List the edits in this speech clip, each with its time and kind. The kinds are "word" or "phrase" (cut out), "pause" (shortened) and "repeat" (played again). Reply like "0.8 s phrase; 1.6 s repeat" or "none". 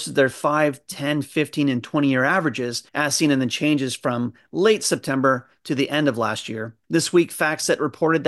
2.9 s pause; 6.8 s pause